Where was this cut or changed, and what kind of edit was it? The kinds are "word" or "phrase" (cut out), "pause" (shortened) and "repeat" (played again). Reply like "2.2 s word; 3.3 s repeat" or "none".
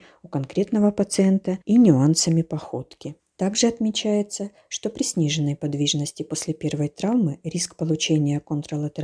1.6 s pause; 3.2 s pause